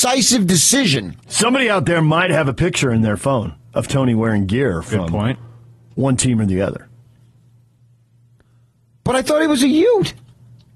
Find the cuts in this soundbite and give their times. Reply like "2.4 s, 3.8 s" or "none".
none